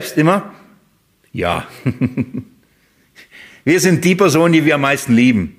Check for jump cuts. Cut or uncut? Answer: uncut